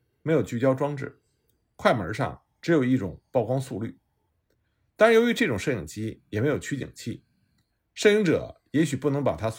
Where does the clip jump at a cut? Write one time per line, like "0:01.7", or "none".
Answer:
none